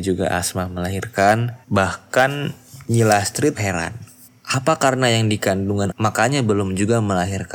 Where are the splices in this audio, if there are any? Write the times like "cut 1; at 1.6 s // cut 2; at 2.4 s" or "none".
cut 1; at 1.6 s // cut 2; at 3.5 s // cut 3; at 4.3 s // cut 4; at 5.9 s